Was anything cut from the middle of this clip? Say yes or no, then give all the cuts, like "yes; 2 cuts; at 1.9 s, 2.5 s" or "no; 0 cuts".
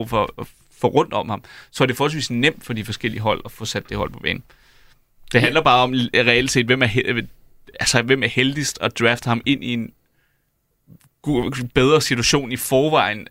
no; 0 cuts